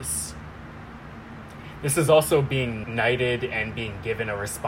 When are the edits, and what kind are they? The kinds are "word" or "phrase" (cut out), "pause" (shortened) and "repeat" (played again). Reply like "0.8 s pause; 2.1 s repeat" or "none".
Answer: 2.8 s word